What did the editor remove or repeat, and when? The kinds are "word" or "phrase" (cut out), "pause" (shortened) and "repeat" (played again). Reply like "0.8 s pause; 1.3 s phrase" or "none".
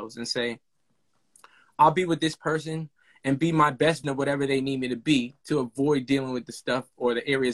4.0 s word